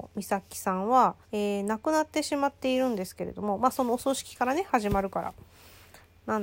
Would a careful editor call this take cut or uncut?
cut